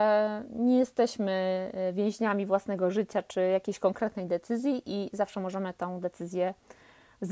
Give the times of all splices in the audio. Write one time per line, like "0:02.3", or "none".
none